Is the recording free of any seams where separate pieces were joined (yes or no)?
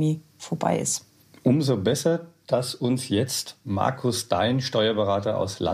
yes